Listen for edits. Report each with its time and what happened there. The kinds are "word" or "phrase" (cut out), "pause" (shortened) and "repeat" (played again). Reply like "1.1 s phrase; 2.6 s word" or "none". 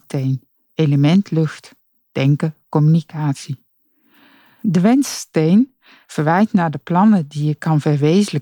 none

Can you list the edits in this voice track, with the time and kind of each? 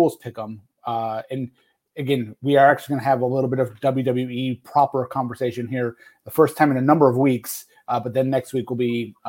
none

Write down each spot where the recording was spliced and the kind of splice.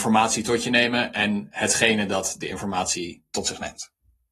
none

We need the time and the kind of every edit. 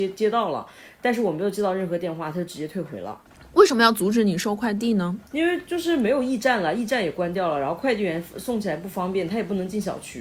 5.3 s pause

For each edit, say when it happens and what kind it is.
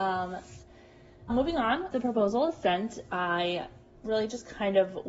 1.3 s word; 1.9 s word; 3.9 s pause

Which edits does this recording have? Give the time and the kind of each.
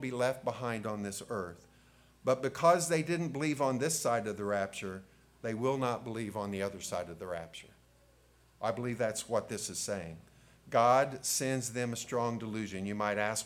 none

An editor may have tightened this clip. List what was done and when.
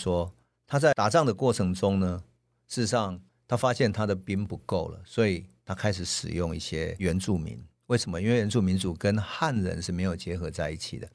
none

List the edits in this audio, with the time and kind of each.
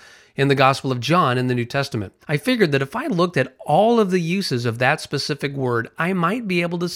2.2 s pause

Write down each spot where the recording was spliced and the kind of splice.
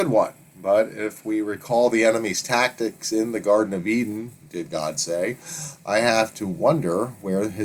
none

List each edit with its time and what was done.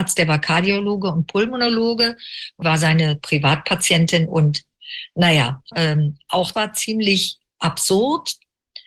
2.6 s word; 5.7 s word; 6.5 s word

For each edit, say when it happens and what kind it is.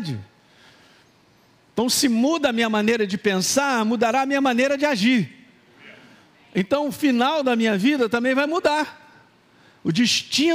none

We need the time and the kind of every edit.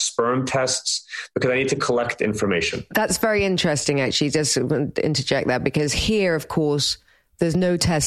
none

